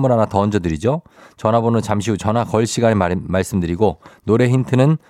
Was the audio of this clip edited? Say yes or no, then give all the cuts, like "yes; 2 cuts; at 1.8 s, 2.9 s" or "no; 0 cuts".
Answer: no; 0 cuts